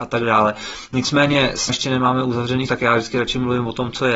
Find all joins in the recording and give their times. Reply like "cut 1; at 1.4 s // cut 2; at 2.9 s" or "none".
cut 1; at 1.7 s // cut 2; at 2.7 s

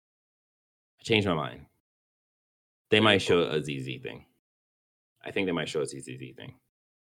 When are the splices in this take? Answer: none

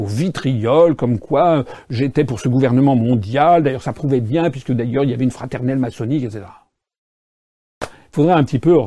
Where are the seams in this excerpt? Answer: none

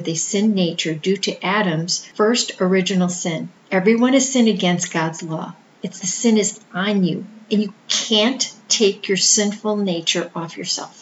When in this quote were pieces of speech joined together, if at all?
cut 1; at 6.0 s

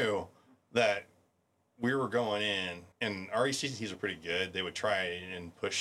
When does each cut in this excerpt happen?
cut 1; at 2.9 s

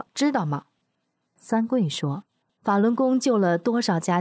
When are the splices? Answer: cut 1; at 2.3 s

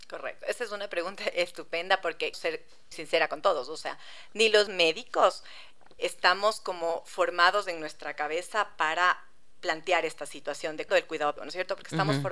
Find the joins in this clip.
cut 1; at 2.3 s // cut 2; at 2.9 s // cut 3; at 4.7 s // cut 4; at 6.0 s // cut 5; at 10.9 s // cut 6; at 11.4 s

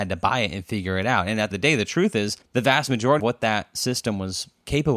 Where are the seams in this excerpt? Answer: cut 1; at 1.5 s // cut 2; at 2.4 s // cut 3; at 3.2 s

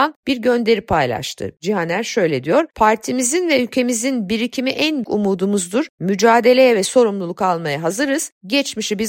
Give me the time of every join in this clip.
cut 1; at 5.0 s

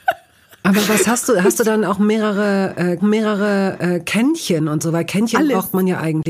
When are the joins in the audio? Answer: cut 1; at 3.0 s

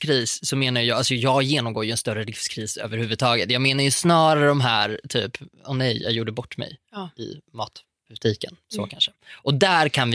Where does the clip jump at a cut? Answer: cut 1; at 6.8 s

